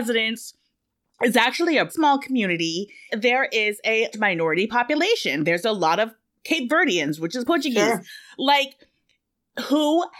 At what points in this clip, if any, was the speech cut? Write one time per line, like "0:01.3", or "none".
0:01.9
0:03.1
0:04.1
0:07.5